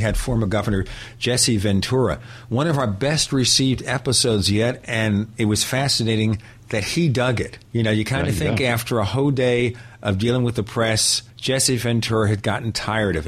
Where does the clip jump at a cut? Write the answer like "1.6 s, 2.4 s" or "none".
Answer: 7.6 s, 11.3 s